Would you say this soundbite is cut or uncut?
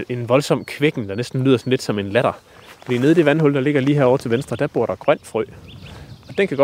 uncut